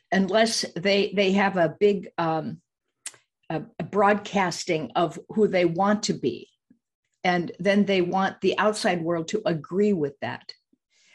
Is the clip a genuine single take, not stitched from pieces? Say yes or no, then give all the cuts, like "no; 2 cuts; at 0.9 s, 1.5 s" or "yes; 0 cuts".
yes; 0 cuts